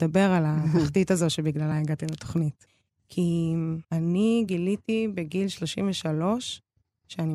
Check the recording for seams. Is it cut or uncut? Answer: uncut